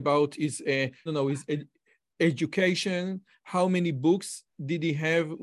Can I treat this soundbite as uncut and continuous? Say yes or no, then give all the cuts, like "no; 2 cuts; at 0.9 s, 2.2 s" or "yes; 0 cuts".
no; 1 cut; at 1.1 s